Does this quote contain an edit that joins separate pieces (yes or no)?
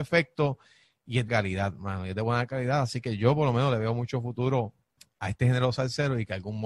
yes